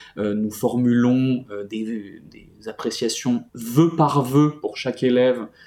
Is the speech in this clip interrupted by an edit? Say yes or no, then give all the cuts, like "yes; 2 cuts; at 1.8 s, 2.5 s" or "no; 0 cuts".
yes; 1 cut; at 3.5 s